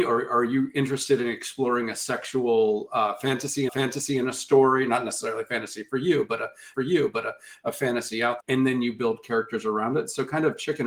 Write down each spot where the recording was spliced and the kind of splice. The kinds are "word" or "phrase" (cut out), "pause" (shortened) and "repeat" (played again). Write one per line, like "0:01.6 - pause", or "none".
0:03.7 - repeat
0:06.7 - repeat
0:08.4 - word